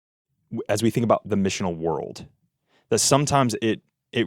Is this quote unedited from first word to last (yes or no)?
yes